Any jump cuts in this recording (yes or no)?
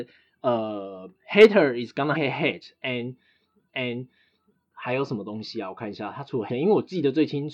yes